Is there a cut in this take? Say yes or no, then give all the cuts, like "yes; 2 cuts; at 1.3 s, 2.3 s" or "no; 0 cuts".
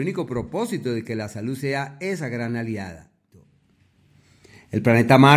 no; 0 cuts